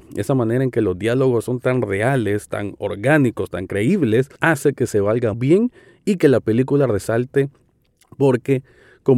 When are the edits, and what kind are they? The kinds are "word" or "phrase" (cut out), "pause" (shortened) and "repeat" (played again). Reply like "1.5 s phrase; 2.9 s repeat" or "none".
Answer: 4.4 s pause; 5.3 s word